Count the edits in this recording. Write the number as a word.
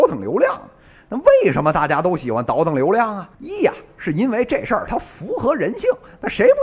one